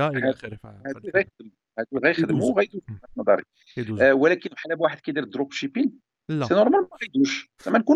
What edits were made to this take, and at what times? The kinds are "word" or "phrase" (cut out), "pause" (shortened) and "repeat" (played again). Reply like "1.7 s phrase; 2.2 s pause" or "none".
none